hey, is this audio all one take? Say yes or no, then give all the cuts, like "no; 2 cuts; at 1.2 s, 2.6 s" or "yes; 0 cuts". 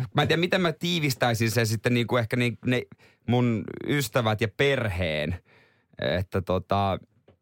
yes; 0 cuts